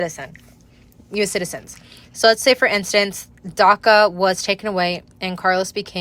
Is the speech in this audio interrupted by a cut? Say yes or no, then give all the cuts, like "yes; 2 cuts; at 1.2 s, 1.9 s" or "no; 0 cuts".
no; 0 cuts